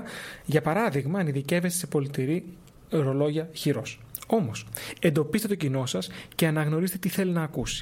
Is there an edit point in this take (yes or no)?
no